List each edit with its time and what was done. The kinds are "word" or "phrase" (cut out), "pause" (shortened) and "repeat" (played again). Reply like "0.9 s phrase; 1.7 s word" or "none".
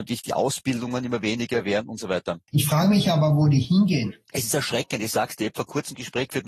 4.2 s pause